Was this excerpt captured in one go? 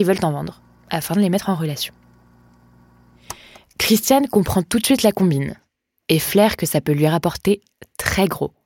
yes; 0 cuts

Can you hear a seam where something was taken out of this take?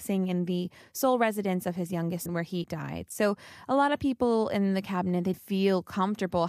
yes; 3 cuts; at 2.3 s, 2.6 s, 5.3 s

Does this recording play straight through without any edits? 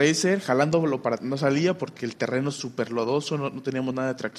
no; 1 cut; at 1.2 s

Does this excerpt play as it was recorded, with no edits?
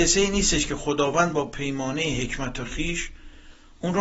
yes; 0 cuts

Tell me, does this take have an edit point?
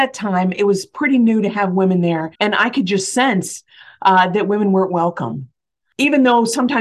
yes; 1 cut; at 2.3 s

